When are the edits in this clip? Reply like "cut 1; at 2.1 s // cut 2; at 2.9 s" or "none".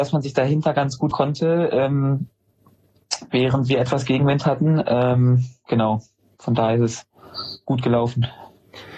cut 1; at 1.1 s